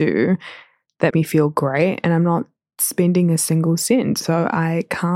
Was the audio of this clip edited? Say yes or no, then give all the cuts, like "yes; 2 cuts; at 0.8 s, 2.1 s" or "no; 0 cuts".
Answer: yes; 1 cut; at 1.1 s